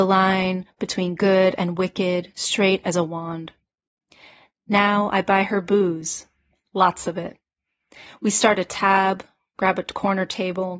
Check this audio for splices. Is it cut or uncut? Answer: uncut